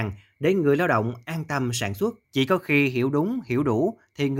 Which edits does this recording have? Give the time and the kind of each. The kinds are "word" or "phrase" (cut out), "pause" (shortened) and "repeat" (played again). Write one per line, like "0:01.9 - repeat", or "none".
0:02.2 - pause